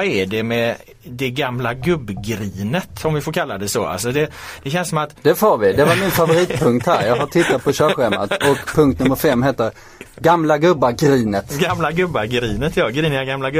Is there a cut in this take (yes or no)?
no